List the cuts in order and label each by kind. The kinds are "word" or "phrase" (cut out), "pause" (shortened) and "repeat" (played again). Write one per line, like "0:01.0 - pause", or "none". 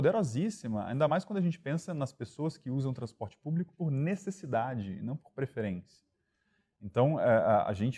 none